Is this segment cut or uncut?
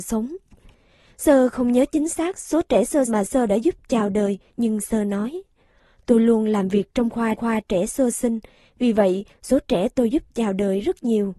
cut